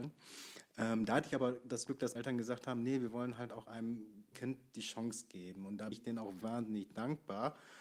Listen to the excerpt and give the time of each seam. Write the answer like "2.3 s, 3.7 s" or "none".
2.2 s, 4.3 s, 5.9 s, 6.4 s